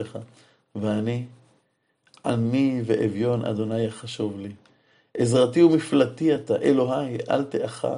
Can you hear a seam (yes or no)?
no